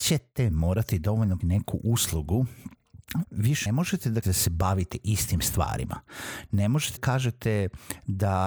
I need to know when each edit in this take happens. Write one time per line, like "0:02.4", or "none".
0:01.4
0:03.2
0:03.7
0:04.2
0:07.0